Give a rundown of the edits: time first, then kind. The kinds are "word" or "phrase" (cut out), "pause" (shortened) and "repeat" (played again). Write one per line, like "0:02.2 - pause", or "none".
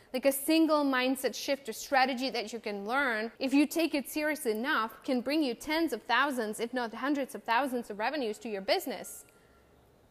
0:03.4 - pause